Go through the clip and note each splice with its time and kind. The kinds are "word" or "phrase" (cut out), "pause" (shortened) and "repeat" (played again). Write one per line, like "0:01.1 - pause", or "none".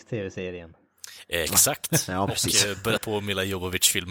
0:03.0 - word

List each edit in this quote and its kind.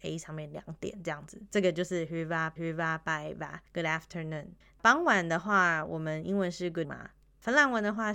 0:02.6 - repeat
0:03.7 - pause
0:04.6 - pause
0:06.8 - word

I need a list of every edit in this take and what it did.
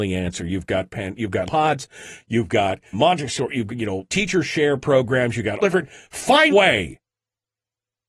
0:01.5 - word
0:02.9 - word
0:03.7 - word
0:04.1 - word
0:05.6 - word
0:06.5 - word

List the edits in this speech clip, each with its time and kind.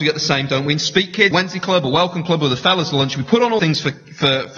0:01.3 - word
0:03.6 - word

